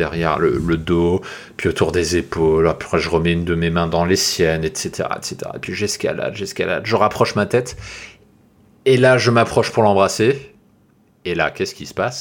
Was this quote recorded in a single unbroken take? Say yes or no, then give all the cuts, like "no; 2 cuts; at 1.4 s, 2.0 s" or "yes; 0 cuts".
yes; 0 cuts